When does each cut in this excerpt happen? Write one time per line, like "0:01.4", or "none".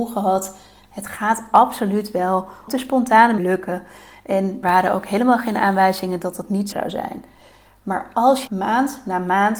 0:02.7
0:03.4
0:04.6
0:06.7
0:08.5